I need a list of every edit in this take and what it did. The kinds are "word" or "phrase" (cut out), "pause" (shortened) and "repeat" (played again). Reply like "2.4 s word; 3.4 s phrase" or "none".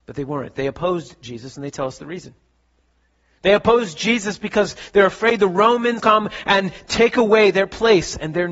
6.0 s word